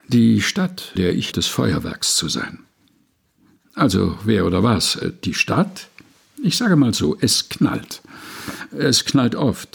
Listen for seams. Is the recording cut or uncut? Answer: cut